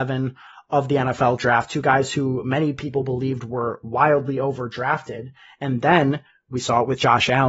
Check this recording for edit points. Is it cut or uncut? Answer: uncut